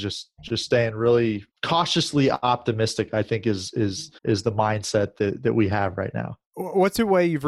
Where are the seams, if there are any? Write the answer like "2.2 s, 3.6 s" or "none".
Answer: 1.5 s, 4.2 s, 6.4 s